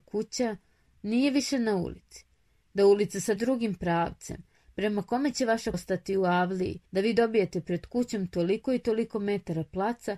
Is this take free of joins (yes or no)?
no